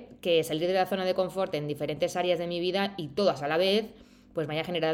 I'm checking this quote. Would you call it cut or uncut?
uncut